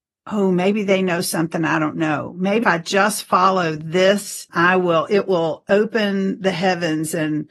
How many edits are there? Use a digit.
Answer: 2